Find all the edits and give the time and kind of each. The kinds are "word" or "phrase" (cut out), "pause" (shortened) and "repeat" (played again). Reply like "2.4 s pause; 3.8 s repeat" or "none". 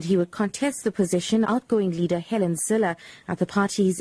1.4 s word